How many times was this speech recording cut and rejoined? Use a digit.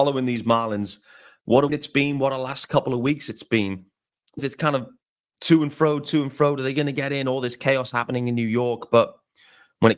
2